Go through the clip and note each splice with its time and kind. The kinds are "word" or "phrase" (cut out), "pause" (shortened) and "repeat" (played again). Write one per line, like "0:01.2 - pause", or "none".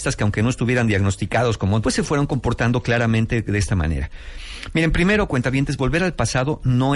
0:01.8 - word